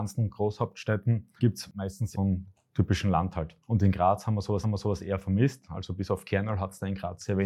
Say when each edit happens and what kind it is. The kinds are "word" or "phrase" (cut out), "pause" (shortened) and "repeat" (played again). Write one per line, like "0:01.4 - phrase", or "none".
0:01.4 - word
0:02.1 - phrase
0:02.5 - pause
0:03.6 - pause
0:04.6 - repeat